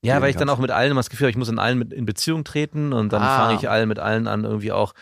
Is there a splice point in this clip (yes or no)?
no